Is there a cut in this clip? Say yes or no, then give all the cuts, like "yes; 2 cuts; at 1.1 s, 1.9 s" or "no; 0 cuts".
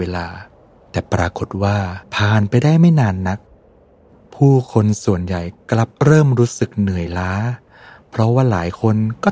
yes; 2 cuts; at 2.0 s, 5.9 s